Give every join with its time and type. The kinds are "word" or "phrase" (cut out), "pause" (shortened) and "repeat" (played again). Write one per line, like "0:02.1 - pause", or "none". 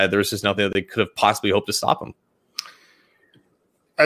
none